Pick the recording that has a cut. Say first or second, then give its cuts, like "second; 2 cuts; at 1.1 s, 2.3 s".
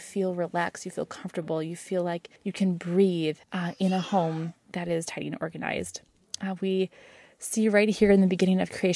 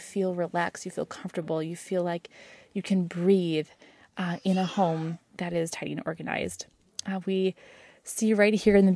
first; 2 cuts; at 2.4 s, 3.4 s